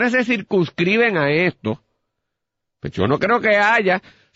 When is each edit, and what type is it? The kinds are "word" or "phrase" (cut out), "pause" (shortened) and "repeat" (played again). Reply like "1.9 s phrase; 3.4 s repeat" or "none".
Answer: none